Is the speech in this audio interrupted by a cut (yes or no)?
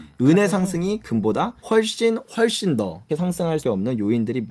yes